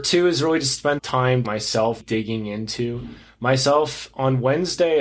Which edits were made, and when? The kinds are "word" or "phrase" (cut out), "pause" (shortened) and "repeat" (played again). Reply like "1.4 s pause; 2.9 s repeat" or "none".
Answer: 1.0 s word; 1.4 s word; 2.0 s word